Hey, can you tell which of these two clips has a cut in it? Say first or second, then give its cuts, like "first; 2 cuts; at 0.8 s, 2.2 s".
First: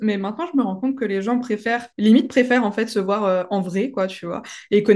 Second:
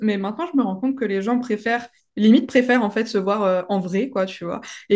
first; 1 cut; at 1.9 s